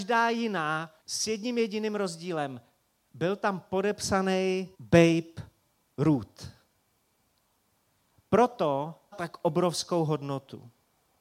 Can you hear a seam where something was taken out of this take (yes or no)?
yes